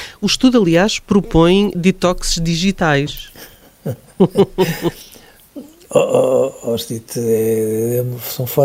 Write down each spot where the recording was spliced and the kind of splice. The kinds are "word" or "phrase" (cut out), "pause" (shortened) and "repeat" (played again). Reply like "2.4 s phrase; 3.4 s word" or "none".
1.7 s word